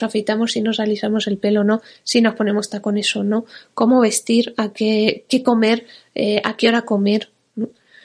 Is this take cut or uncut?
uncut